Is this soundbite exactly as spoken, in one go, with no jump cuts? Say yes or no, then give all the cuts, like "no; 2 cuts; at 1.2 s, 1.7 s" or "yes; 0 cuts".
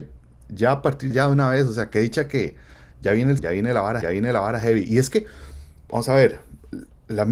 no; 3 cuts; at 1.1 s, 3.4 s, 4.0 s